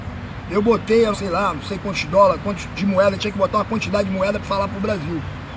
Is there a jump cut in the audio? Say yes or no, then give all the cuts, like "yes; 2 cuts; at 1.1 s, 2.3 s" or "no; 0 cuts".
yes; 2 cuts; at 1.1 s, 4.4 s